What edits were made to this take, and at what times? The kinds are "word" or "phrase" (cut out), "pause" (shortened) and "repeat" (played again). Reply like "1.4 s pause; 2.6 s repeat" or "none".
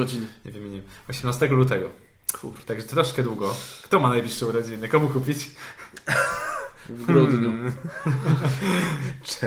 none